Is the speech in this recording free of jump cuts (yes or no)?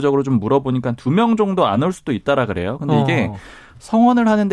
yes